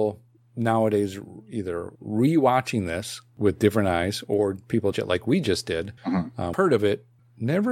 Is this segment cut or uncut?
cut